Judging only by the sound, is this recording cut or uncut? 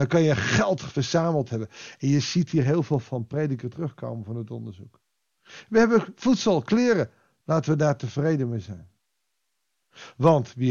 uncut